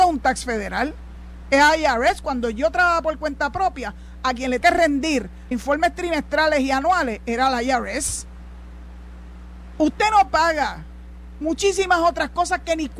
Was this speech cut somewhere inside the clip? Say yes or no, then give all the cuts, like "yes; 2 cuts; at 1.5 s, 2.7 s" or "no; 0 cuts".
yes; 2 cuts; at 4.6 s, 5.5 s